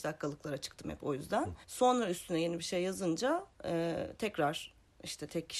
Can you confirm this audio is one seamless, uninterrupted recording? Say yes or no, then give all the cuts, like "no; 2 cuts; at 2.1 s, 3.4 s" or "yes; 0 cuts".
no; 2 cuts; at 1.6 s, 3.5 s